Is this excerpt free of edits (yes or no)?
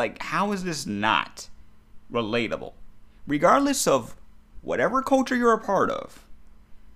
yes